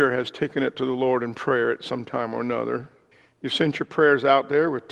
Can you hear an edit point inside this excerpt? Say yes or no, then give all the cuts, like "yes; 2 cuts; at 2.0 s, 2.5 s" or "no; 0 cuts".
yes; 1 cut; at 3.1 s